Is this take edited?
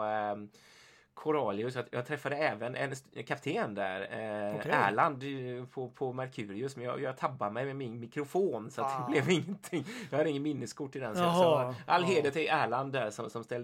no; 0 cuts

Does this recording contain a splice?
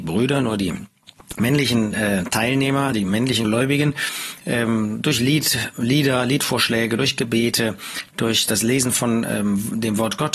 no; 0 cuts

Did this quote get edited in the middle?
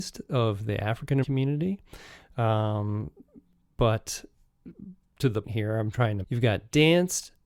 yes; 3 cuts; at 1.2 s, 5.4 s, 6.2 s

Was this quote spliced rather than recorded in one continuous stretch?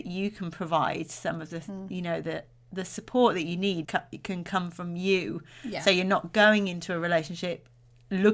yes; 1 cut; at 3.8 s

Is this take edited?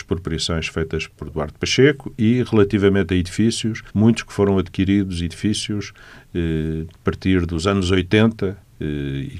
yes; 2 cuts; at 3.9 s, 6.9 s

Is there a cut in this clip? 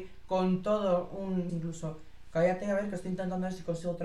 yes; 1 cut; at 1.5 s

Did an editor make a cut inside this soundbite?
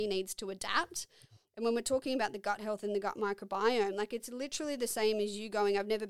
no; 0 cuts

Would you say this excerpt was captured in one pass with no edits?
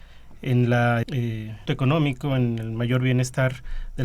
no; 2 cuts; at 1.0 s, 1.7 s

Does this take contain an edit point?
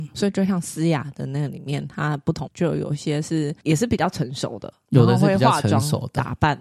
yes; 1 cut; at 2.5 s

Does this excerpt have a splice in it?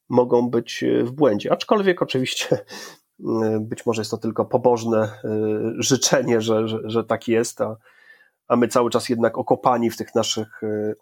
no; 0 cuts

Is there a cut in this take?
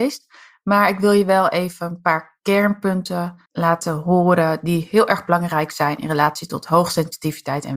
yes; 1 cut; at 3.5 s

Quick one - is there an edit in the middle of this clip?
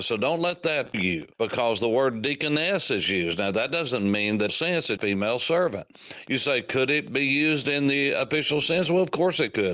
yes; 4 cuts; at 0.9 s, 1.3 s, 4.5 s, 5.0 s

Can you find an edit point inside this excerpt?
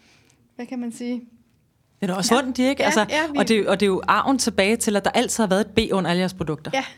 yes; 1 cut; at 2.3 s

